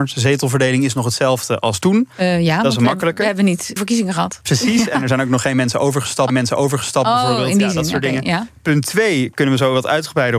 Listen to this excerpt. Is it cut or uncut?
cut